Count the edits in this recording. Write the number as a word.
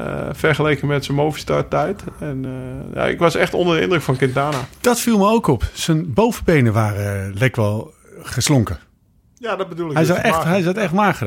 zero